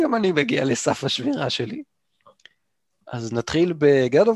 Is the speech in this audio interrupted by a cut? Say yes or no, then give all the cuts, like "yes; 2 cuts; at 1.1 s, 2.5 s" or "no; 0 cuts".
no; 0 cuts